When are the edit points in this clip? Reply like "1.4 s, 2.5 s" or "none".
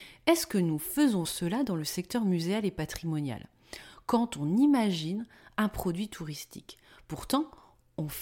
1.2 s